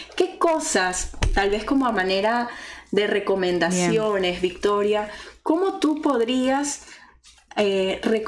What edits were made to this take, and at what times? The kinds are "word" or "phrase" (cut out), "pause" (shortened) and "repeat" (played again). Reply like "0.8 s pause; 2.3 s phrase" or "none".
none